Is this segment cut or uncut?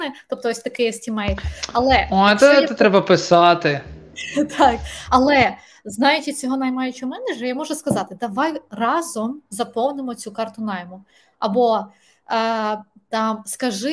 cut